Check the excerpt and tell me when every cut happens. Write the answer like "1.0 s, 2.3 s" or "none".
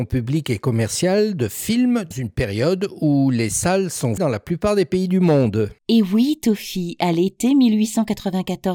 2.1 s, 4.2 s, 5.8 s